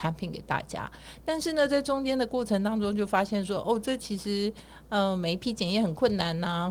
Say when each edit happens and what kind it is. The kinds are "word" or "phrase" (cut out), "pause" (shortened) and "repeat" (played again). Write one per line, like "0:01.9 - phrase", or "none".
none